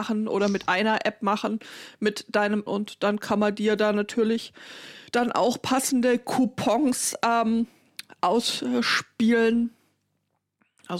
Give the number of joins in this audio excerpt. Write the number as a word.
two